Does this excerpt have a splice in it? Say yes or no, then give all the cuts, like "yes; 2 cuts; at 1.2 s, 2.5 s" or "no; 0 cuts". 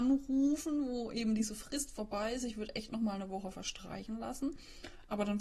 no; 0 cuts